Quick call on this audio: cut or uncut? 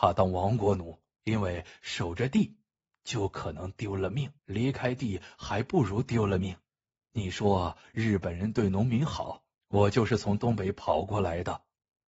cut